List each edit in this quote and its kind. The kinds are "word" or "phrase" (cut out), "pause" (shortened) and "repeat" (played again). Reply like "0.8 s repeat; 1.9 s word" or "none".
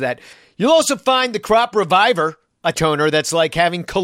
2.7 s word